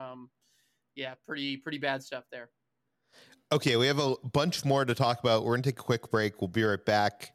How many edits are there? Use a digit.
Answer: 0